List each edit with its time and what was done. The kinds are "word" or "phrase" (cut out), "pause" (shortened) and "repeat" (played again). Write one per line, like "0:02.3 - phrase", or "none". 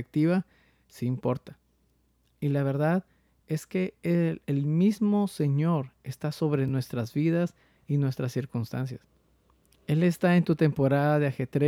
none